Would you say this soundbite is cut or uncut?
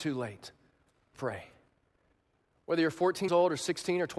cut